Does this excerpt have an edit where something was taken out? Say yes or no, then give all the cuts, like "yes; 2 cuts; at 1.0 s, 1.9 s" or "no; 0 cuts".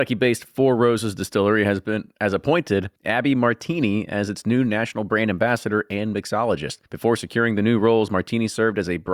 yes; 2 cuts; at 3.0 s, 6.9 s